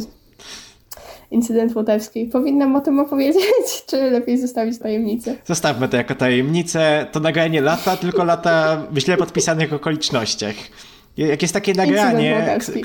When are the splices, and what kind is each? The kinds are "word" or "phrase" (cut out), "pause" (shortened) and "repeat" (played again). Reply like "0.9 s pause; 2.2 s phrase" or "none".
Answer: 4.8 s word